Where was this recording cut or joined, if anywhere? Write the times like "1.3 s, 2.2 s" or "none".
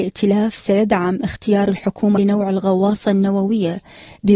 2.2 s